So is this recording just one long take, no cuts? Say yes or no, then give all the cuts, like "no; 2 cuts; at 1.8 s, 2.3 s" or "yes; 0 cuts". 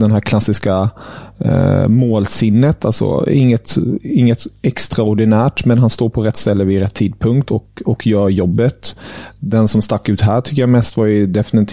yes; 0 cuts